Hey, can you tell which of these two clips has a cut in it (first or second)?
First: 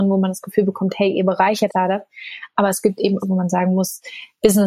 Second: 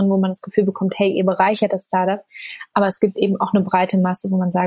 first